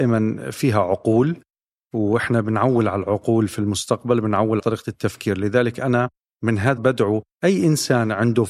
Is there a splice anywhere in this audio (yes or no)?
yes